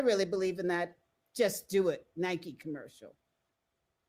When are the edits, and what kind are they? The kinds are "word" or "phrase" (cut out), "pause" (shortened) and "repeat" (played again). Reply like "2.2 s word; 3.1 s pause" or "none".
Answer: none